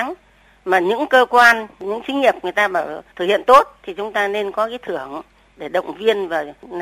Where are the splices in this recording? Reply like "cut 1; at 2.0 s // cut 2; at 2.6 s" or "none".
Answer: cut 1; at 3.1 s